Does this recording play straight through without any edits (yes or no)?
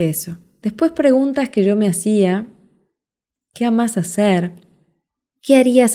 yes